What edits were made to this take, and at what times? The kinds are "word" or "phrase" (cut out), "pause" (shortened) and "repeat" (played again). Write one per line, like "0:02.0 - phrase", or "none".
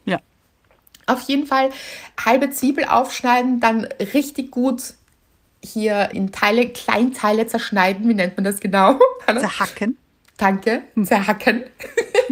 0:02.2 - word
0:06.1 - word

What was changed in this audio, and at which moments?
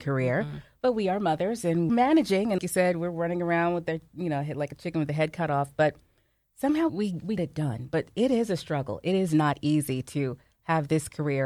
0:01.9 - word
0:02.6 - word
0:06.9 - word
0:07.4 - word

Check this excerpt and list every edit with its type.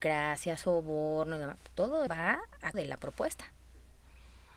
0:02.1 - word
0:02.7 - word

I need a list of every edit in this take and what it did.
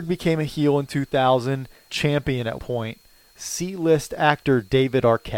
0:01.9 - phrase
0:02.6 - word
0:03.3 - word

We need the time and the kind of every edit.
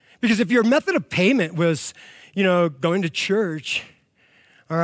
none

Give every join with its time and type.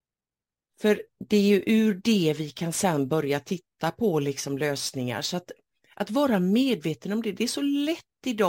none

